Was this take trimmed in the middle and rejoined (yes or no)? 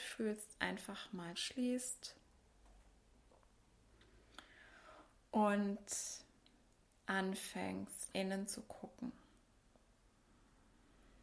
yes